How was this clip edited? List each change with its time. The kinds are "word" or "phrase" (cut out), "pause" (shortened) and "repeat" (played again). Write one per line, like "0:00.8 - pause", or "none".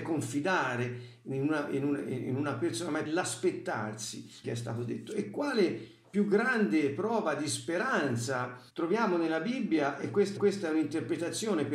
0:03.1 - word
0:04.4 - phrase
0:08.7 - pause
0:10.4 - repeat